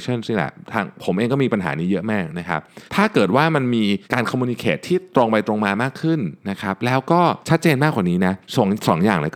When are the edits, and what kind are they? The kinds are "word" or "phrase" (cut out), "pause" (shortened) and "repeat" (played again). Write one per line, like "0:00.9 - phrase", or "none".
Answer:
0:02.9 - pause
0:04.0 - pause
0:06.4 - pause
0:07.4 - pause
0:08.4 - pause